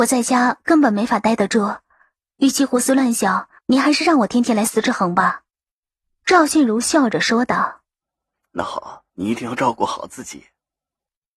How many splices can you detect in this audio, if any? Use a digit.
4